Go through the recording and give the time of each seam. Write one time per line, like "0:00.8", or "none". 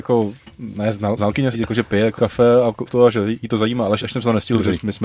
0:01.2
0:01.5
0:02.2
0:02.9
0:04.0